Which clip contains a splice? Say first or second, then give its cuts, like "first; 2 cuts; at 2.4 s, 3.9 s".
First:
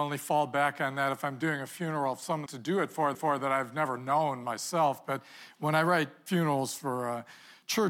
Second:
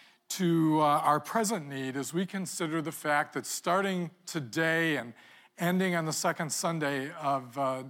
first; 2 cuts; at 2.5 s, 3.1 s